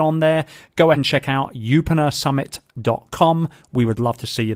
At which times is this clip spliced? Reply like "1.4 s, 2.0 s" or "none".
0.9 s

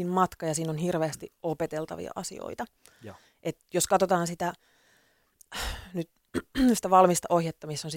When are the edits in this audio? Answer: none

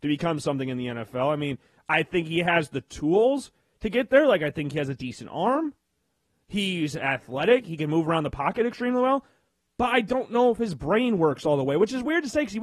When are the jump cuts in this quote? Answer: none

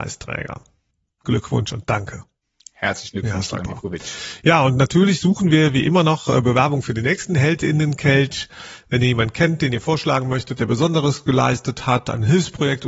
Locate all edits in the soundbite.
none

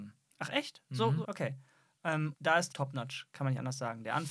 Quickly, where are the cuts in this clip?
1.2 s, 2.3 s, 2.7 s

